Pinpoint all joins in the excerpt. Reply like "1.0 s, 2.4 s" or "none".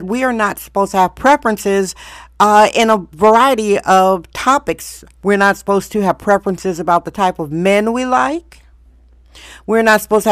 none